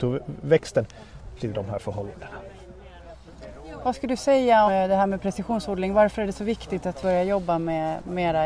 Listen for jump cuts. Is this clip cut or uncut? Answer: cut